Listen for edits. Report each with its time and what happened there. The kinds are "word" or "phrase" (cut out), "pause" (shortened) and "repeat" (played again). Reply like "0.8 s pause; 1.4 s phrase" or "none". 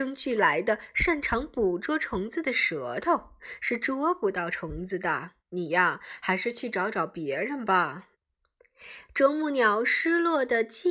5.4 s pause; 8.1 s pause